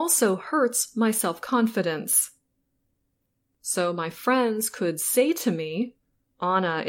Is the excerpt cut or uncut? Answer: uncut